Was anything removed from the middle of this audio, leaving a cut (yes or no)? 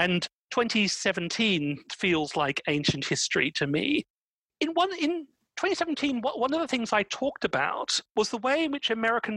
no